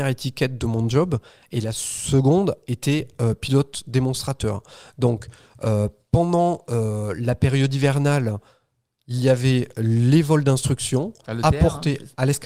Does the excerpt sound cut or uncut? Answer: uncut